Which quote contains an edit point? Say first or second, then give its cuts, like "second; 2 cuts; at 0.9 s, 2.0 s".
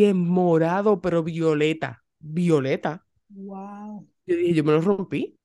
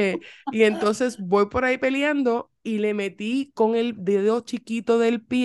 second; 1 cut; at 2.6 s